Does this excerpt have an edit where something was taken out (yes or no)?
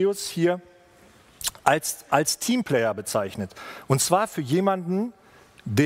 no